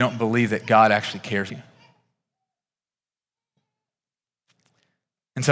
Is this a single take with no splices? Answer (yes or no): no